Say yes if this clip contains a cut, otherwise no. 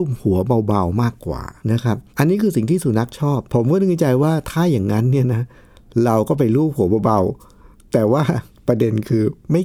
yes